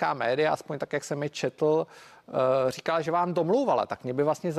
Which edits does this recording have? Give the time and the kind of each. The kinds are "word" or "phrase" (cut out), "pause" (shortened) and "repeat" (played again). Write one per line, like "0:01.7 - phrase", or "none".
none